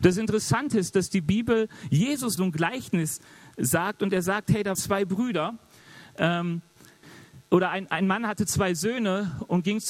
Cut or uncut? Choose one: cut